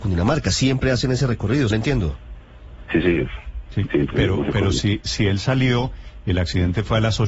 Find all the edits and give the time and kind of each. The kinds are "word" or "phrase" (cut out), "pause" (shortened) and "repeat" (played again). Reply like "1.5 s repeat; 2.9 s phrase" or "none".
1.7 s word; 4.1 s word